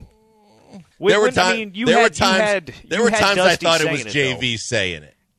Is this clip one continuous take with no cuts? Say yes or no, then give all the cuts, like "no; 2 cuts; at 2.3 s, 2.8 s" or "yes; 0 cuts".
no; 1 cut; at 0.9 s